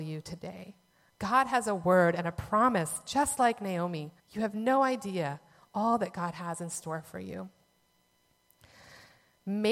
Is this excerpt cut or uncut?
cut